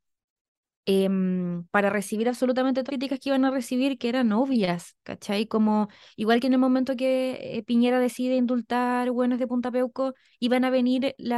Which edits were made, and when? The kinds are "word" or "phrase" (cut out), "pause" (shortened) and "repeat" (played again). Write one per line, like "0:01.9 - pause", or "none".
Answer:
0:01.7 - pause
0:02.9 - word